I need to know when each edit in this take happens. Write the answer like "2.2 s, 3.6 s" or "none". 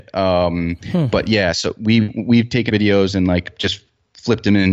2.7 s